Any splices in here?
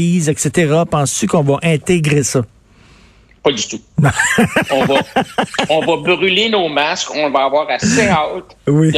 no; 0 cuts

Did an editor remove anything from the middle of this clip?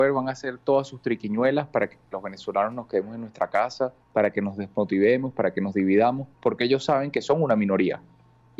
yes; 2 cuts; at 4.0 s, 6.3 s

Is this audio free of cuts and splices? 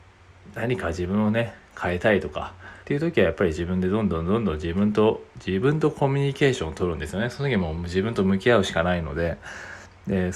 no; 1 cut; at 2.8 s

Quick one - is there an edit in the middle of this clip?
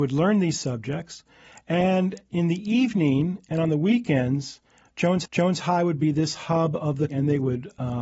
yes; 2 cuts; at 5.3 s, 7.1 s

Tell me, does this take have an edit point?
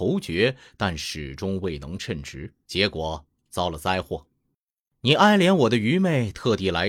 yes; 1 cut; at 2.6 s

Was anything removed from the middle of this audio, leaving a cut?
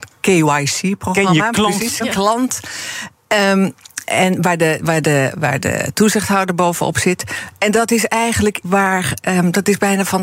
yes; 2 cuts; at 2.0 s, 8.6 s

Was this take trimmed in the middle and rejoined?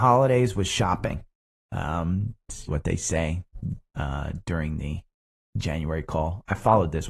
yes; 1 cut; at 2.7 s

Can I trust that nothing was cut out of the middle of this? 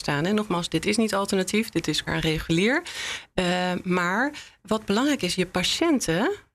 no; 2 cuts; at 2.1 s, 4.6 s

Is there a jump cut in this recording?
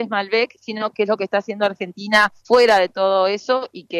yes; 1 cut; at 2.4 s

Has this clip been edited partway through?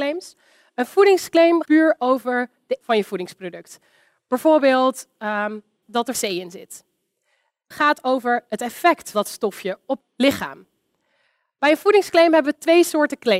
yes; 7 cuts; at 1.6 s, 2.8 s, 5.8 s, 6.1 s, 7.7 s, 9.1 s, 10.0 s

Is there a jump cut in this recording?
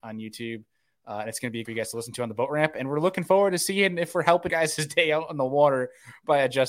yes; 2 cuts; at 1.6 s, 4.5 s

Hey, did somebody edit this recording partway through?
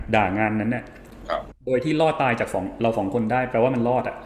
yes; 1 cut; at 1.6 s

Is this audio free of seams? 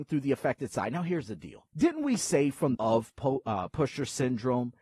no; 2 cuts; at 1.7 s, 2.7 s

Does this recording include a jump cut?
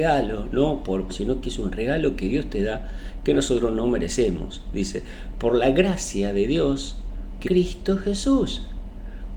yes; 2 cuts; at 1.1 s, 7.4 s

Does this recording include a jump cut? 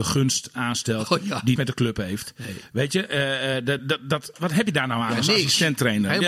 yes; 3 cuts; at 1.6 s, 3.8 s, 4.3 s

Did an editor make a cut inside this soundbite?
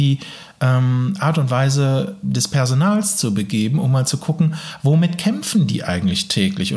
yes; 1 cut; at 2.2 s

